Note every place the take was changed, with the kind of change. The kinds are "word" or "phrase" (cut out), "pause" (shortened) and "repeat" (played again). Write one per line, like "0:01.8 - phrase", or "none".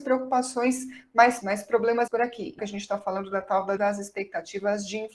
0:01.4 - word
0:02.1 - word
0:02.6 - phrase
0:03.8 - word